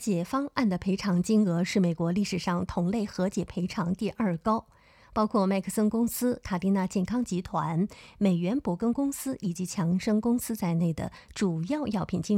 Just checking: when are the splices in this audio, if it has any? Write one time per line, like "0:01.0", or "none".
none